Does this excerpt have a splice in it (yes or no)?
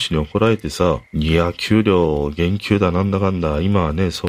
yes